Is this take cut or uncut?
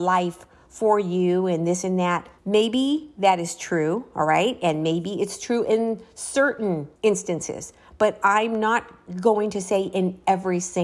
cut